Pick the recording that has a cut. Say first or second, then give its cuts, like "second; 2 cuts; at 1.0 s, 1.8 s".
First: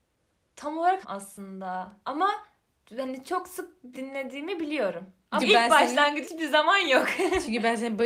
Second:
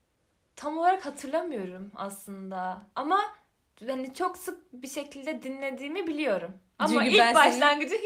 first; 4 cuts; at 1.0 s, 3.9 s, 5.4 s, 6.2 s